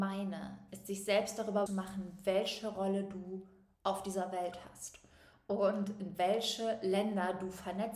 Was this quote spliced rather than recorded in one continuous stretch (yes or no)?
yes